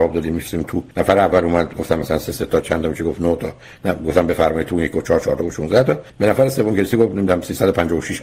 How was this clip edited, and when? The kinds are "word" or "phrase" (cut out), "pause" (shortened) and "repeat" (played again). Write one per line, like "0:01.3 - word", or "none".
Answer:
0:00.9 - pause
0:06.1 - pause